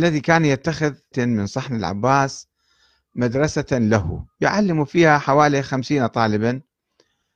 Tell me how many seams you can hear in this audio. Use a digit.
1